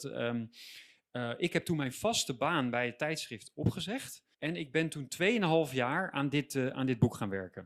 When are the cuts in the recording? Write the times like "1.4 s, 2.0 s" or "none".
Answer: 4.3 s